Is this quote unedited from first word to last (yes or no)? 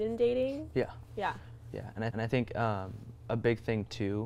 no